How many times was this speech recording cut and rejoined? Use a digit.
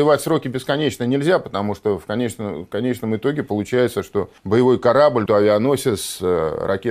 2